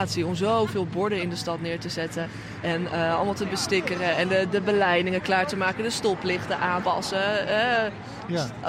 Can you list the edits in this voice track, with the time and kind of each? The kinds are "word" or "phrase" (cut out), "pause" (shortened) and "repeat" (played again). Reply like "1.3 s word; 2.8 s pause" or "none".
6.8 s word